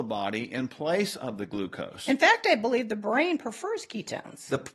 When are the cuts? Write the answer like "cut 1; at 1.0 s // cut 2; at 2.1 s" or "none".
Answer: none